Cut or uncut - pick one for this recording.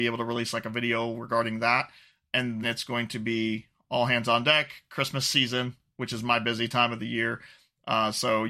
cut